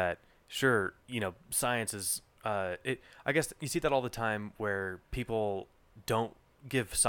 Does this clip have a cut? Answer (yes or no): yes